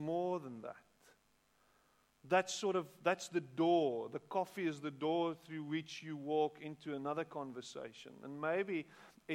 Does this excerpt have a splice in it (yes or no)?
no